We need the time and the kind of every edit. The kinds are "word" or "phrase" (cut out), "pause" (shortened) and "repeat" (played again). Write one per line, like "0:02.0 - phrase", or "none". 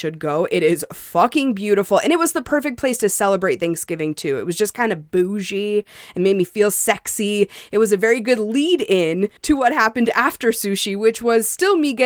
0:09.4 - pause